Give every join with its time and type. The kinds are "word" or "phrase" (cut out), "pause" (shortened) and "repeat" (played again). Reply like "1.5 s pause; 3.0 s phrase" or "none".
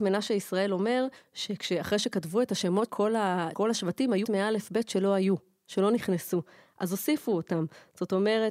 2.9 s word; 3.5 s word; 4.2 s word

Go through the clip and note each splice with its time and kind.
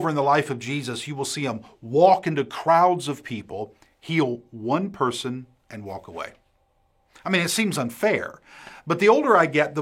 none

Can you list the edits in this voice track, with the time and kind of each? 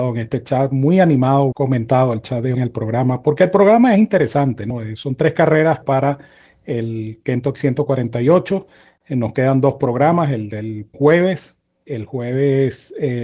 1.5 s word; 2.5 s word; 5.8 s word; 7.6 s word; 10.9 s word

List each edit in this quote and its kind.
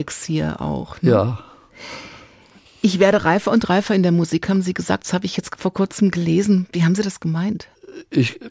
none

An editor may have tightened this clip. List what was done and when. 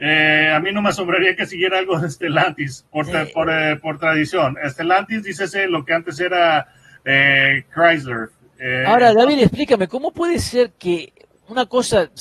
2.9 s pause

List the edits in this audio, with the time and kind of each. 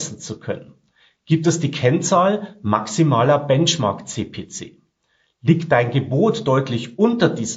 none

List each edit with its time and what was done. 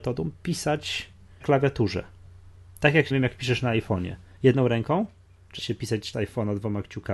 1.4 s word; 3.1 s word; 5.6 s word; 6.1 s word

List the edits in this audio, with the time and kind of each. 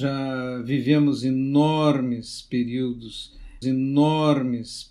3.6 s repeat

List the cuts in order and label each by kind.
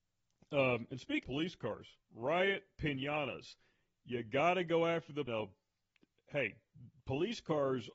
1.2 s word; 2.0 s pause; 5.3 s phrase

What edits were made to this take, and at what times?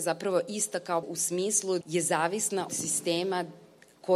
1.0 s phrase; 1.8 s word; 2.7 s word

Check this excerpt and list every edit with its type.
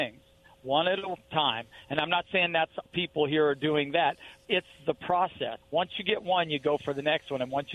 2.9 s word; 4.4 s word; 5.6 s pause

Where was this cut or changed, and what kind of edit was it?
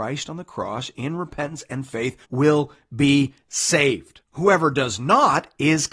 2.2 s pause; 4.2 s pause

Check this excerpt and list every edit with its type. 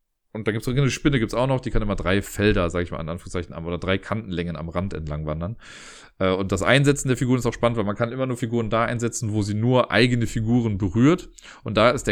none

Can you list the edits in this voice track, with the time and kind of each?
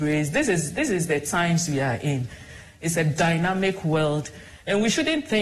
2.9 s phrase

